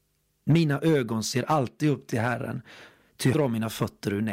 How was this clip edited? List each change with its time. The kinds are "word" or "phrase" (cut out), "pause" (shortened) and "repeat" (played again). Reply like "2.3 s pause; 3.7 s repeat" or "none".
3.3 s word